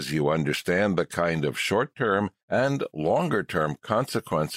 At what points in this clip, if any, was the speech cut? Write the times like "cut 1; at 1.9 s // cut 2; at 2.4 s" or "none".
cut 1; at 2.4 s